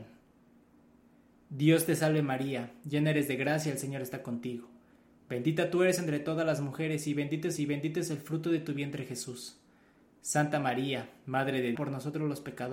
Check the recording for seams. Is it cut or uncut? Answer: cut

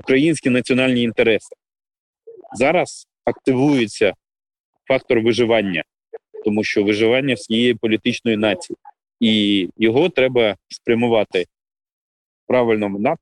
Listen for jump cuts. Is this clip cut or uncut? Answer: uncut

